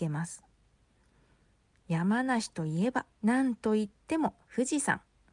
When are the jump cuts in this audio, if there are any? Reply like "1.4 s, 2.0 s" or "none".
3.1 s